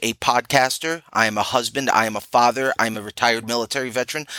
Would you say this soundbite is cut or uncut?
uncut